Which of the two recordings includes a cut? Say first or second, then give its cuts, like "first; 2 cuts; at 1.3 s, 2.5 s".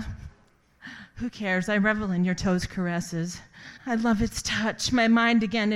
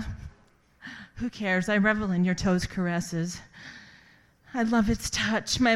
first; 1 cut; at 3.8 s